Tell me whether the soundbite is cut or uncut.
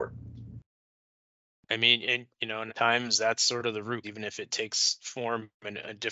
cut